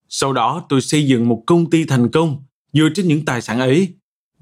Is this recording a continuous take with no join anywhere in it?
yes; 0 cuts

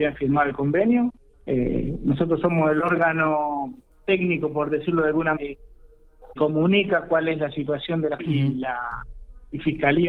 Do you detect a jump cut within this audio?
yes; 5 cuts; at 1.3 s, 3.9 s, 5.4 s, 6.4 s, 8.2 s

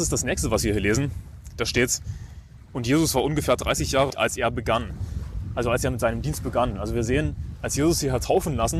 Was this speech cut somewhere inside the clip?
yes; 1 cut; at 4.1 s

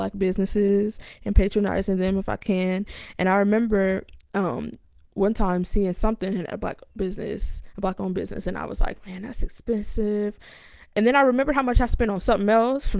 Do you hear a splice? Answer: no; 0 cuts

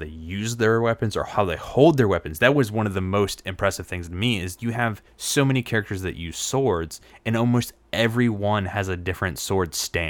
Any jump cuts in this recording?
yes; 2 cuts; at 4.6 s, 5.1 s

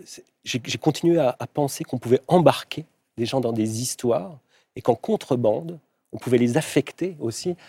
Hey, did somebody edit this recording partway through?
no; 0 cuts

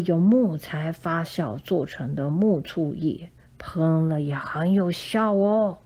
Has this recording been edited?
yes; 1 cut; at 3.4 s

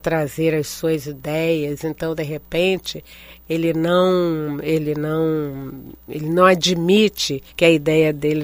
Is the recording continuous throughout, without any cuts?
no; 1 cut; at 7.5 s

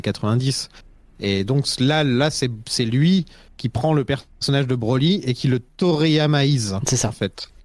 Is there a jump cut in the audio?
no; 0 cuts

